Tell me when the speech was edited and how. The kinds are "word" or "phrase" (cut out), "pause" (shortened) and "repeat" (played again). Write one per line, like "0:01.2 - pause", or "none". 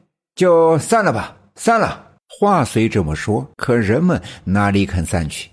0:02.2 - pause
0:03.5 - pause